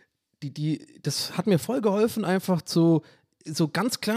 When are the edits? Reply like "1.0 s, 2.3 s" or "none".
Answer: none